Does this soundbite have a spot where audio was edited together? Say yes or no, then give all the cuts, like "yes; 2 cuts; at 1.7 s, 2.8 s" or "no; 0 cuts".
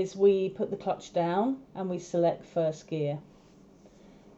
yes; 1 cut; at 1.7 s